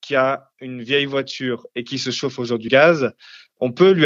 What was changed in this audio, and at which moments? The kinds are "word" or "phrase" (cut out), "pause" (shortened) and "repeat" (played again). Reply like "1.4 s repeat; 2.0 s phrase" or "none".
2.7 s word